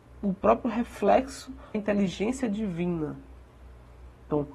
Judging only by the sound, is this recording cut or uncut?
cut